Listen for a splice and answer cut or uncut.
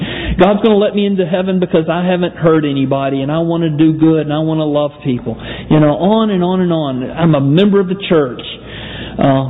cut